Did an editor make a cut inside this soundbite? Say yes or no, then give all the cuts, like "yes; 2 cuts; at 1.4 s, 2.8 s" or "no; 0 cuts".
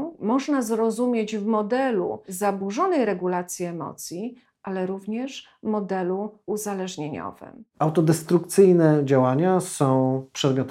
no; 0 cuts